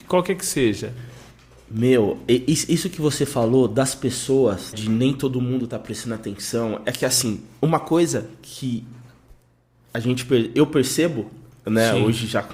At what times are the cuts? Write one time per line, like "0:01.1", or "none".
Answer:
0:04.7